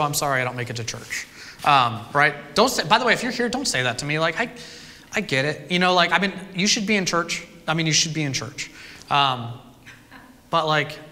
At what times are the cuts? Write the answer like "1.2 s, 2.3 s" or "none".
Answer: none